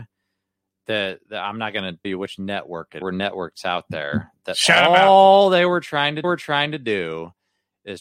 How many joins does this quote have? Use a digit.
4